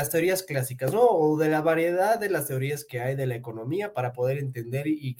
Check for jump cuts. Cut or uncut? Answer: uncut